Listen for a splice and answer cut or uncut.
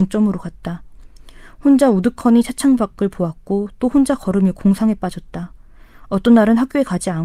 uncut